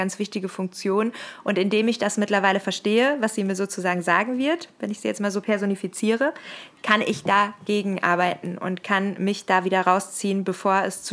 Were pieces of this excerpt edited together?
yes; 1 cut; at 6.8 s

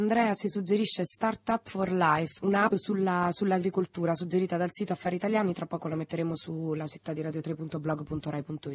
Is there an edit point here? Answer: yes; 2 cuts; at 2.4 s, 2.7 s

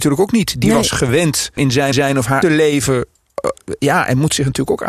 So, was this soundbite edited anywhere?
yes; 3 cuts; at 1.6 s, 1.9 s, 2.4 s

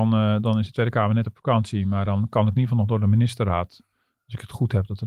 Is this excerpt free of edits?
yes; 0 cuts

